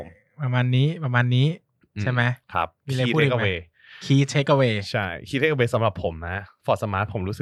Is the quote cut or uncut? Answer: uncut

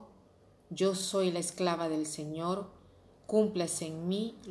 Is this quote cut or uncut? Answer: uncut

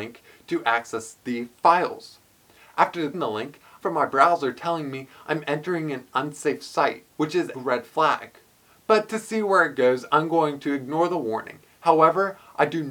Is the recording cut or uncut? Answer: cut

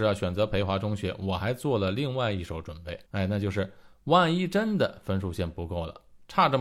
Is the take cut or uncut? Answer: cut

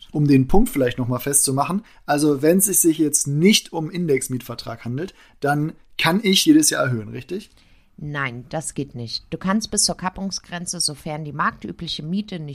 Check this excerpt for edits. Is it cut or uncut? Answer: cut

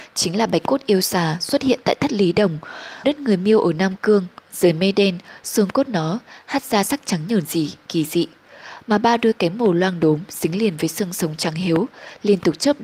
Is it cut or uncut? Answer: cut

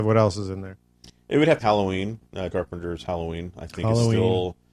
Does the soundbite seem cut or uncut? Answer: cut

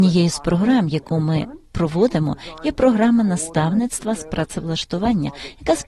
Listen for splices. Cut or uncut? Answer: uncut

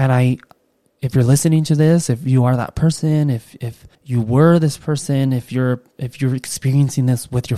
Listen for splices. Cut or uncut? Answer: cut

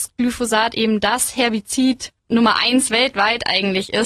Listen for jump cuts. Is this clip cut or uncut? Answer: cut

